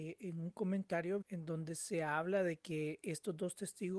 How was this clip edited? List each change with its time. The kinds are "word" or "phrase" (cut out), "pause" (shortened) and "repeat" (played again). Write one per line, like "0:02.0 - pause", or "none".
0:01.2 - word